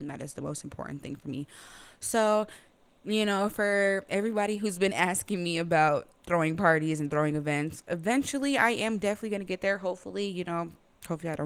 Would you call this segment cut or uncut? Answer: uncut